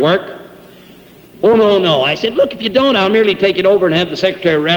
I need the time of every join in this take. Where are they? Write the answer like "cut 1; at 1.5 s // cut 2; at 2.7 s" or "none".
none